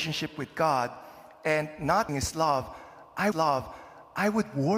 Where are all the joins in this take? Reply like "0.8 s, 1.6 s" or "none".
2.1 s, 3.3 s